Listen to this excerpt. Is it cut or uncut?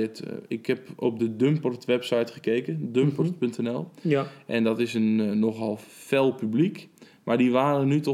uncut